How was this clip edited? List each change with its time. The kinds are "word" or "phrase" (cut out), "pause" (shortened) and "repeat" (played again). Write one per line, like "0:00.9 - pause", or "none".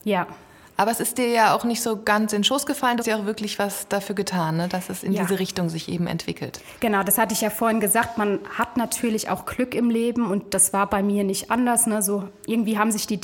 0:03.0 - word